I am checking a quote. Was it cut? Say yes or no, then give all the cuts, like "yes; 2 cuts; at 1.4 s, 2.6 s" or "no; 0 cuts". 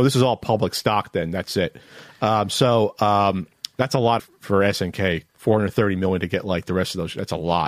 yes; 2 cuts; at 4.2 s, 5.3 s